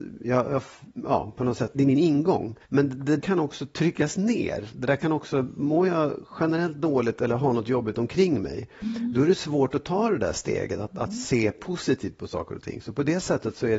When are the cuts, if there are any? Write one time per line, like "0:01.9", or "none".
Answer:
0:01.7
0:02.6
0:03.2